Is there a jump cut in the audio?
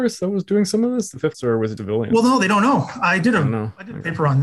yes; 2 cuts; at 1.3 s, 1.8 s

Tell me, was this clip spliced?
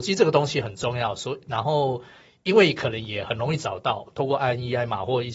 no; 0 cuts

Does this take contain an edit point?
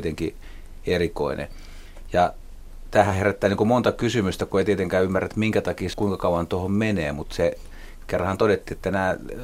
yes; 1 cut; at 5.9 s

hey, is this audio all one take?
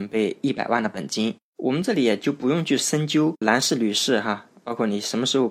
no; 1 cut; at 3.4 s

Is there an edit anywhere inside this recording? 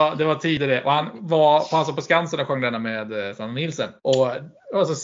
yes; 1 cut; at 4.0 s

